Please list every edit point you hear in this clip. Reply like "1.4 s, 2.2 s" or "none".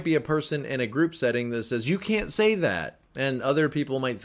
3.0 s